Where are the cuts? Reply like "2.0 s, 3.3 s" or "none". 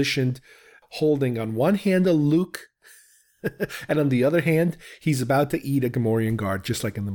none